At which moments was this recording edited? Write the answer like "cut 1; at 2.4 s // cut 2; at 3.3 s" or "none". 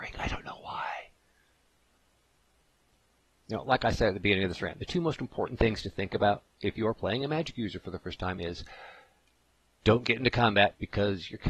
none